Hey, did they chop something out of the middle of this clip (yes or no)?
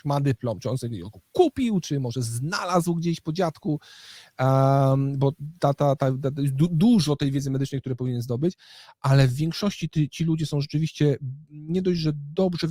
no